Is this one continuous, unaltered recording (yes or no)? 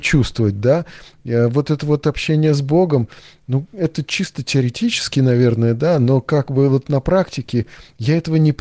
yes